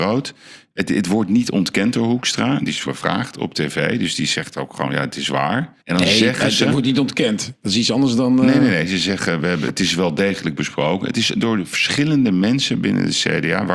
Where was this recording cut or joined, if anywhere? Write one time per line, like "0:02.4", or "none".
0:02.9
0:05.8